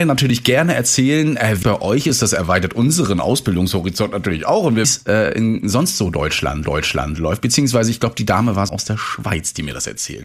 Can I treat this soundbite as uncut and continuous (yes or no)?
no